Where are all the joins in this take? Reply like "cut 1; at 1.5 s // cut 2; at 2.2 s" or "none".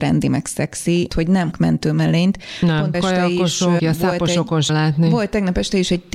cut 1; at 1.1 s // cut 2; at 1.5 s // cut 3; at 2.9 s // cut 4; at 3.8 s // cut 5; at 4.7 s